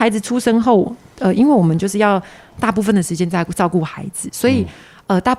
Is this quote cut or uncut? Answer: uncut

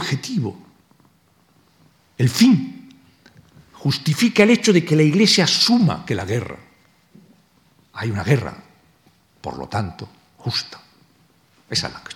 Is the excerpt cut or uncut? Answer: uncut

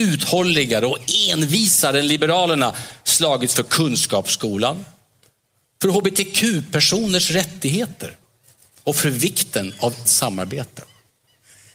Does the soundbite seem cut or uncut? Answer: cut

